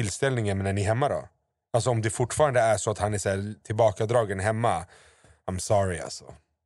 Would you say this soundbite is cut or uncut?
uncut